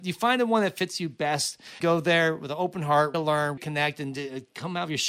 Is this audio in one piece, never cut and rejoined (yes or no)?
no